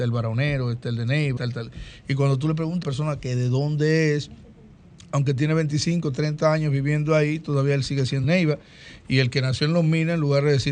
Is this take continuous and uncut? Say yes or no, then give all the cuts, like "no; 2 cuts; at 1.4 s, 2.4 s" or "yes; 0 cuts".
no; 3 cuts; at 1.4 s, 2.8 s, 8.2 s